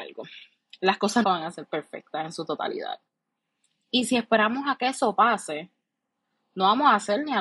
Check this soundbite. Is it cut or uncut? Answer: cut